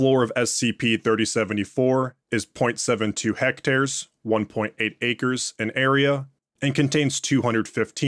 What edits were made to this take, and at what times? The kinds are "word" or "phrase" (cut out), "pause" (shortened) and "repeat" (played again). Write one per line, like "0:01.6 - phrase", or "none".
none